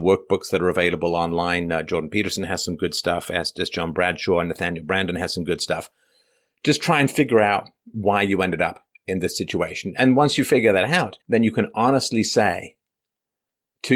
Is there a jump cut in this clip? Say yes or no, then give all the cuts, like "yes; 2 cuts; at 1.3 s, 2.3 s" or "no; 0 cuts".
yes; 1 cut; at 11.2 s